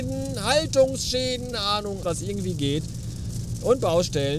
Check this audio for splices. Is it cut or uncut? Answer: cut